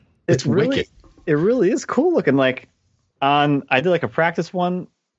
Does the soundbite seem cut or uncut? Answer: uncut